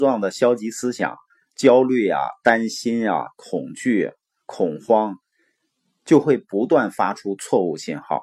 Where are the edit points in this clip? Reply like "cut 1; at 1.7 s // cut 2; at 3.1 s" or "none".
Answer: none